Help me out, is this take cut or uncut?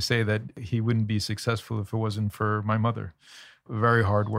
uncut